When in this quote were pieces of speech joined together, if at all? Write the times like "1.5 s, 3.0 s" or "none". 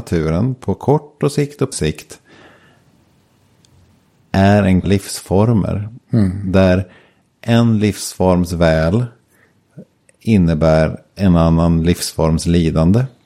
1.7 s, 4.8 s